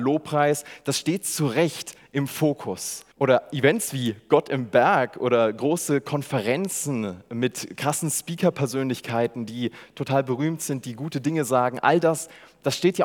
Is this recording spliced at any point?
yes; 1 cut; at 3.1 s

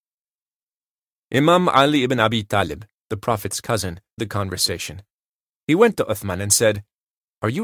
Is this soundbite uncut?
no; 1 cut; at 4.2 s

